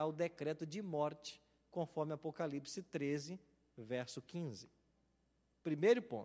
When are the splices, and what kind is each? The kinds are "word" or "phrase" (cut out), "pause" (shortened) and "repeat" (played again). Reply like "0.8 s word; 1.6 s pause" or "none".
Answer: none